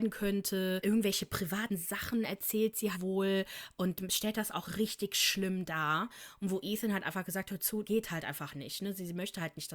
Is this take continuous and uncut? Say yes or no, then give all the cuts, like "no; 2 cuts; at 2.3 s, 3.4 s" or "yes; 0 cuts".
no; 2 cuts; at 2.9 s, 7.8 s